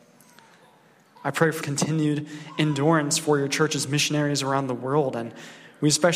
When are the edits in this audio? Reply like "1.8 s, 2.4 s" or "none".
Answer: 1.6 s